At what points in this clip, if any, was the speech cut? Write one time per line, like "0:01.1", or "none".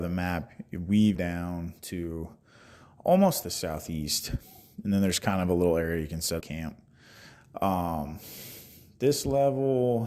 0:01.1
0:03.4
0:06.4